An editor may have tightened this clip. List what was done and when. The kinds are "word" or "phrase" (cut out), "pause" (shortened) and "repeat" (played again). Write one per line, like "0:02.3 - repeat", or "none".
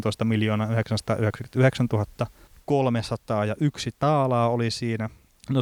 none